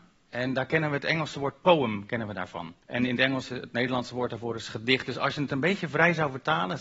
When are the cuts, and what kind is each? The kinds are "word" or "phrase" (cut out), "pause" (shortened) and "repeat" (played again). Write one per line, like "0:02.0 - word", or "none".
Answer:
0:02.8 - pause